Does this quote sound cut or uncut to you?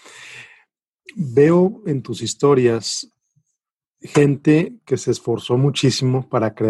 uncut